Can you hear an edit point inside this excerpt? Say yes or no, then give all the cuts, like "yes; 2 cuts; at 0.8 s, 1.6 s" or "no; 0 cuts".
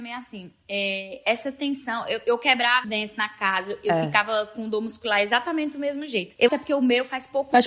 yes; 2 cuts; at 2.8 s, 6.5 s